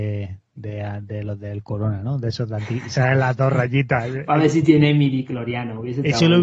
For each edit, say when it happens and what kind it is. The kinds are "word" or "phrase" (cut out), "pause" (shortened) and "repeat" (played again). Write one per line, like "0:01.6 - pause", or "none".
none